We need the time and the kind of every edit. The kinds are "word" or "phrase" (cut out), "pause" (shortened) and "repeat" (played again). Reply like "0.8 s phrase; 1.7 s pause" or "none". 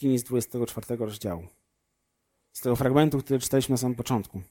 none

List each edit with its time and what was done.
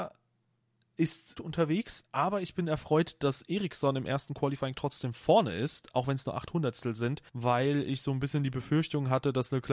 1.4 s phrase; 7.3 s pause

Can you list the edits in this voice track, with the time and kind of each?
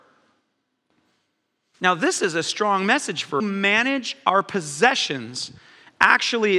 3.4 s phrase

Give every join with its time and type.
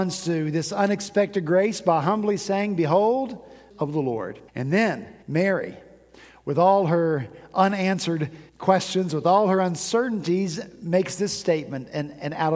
3.7 s phrase; 4.5 s pause; 5.2 s pause; 8.5 s pause

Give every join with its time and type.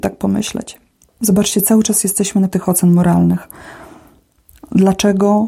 2.5 s word

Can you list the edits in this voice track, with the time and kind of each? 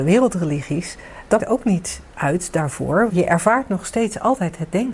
1.4 s word; 2.1 s pause; 3.1 s word

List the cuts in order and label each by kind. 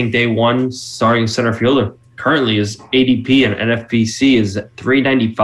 none

